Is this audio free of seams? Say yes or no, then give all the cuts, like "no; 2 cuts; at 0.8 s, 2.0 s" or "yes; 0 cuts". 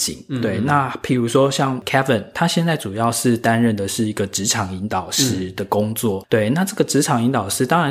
yes; 0 cuts